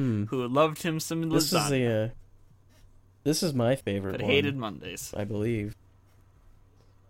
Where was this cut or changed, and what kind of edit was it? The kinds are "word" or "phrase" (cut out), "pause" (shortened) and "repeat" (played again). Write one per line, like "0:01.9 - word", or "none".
none